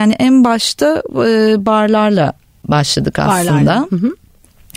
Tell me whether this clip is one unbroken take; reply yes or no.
yes